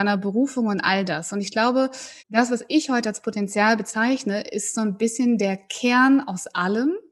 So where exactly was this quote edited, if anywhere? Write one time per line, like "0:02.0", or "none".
0:02.2